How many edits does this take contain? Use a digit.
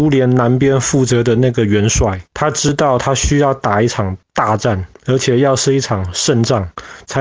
2